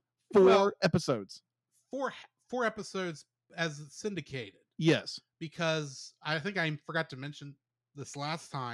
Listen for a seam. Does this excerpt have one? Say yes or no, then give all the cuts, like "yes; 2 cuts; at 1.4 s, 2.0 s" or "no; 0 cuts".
no; 0 cuts